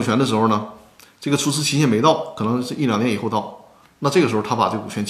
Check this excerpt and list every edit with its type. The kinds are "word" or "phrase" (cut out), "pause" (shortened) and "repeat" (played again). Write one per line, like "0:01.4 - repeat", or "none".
none